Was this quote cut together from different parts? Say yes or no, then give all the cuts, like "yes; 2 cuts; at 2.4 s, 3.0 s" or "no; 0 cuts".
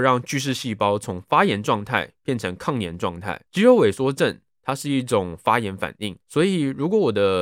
yes; 2 cuts; at 3.5 s, 6.2 s